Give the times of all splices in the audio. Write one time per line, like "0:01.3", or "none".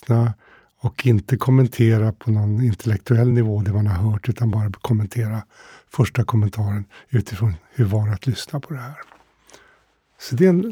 none